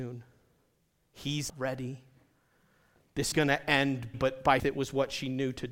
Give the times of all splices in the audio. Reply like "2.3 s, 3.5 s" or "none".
1.5 s, 3.3 s, 4.1 s, 4.6 s